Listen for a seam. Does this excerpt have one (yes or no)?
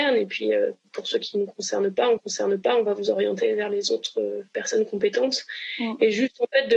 yes